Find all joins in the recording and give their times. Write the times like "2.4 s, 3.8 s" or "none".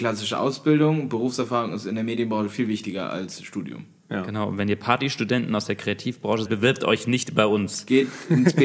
6.5 s